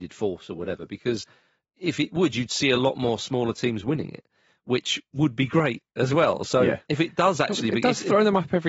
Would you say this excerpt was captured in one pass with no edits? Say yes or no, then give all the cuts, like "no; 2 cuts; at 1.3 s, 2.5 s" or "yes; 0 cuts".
yes; 0 cuts